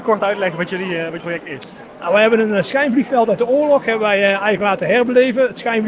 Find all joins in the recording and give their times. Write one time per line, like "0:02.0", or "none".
0:01.2